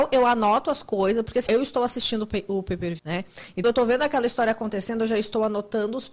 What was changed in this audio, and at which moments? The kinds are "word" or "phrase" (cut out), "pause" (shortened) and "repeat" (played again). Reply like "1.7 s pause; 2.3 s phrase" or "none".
1.5 s word; 3.0 s word; 3.6 s word